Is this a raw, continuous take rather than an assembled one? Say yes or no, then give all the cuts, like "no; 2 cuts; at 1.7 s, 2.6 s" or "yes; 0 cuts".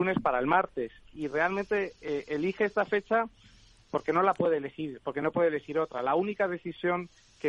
yes; 0 cuts